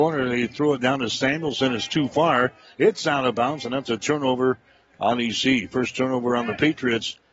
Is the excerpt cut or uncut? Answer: uncut